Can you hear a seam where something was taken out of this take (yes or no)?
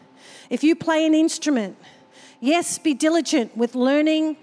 no